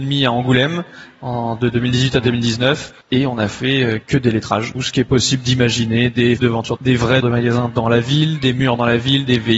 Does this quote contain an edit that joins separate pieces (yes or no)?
yes